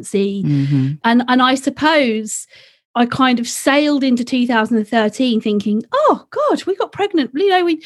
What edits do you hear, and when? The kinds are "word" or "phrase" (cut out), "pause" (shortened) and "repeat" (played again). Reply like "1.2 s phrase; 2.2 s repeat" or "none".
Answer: none

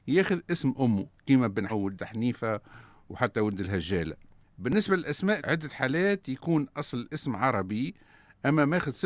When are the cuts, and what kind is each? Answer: 1.7 s word; 5.4 s word

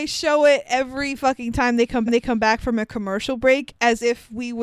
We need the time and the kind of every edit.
2.1 s repeat

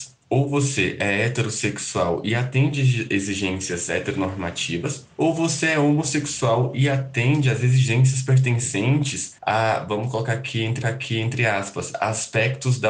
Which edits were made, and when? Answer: 9.4 s pause; 10.8 s repeat

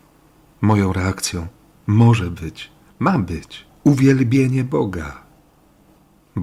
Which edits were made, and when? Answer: none

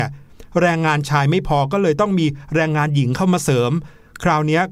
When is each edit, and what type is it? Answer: none

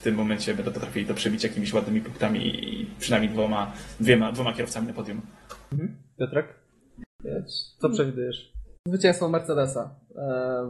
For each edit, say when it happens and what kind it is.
8.8 s pause

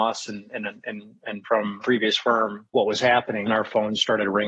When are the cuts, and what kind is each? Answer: 1.8 s word; 2.7 s pause; 3.5 s word

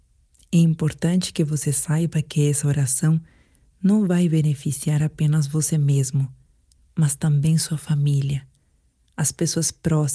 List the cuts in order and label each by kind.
none

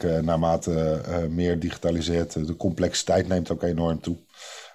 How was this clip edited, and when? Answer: none

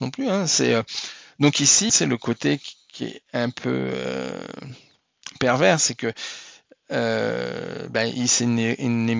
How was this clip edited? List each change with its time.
1.9 s phrase

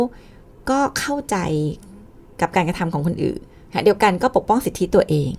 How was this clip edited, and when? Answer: 3.5 s pause

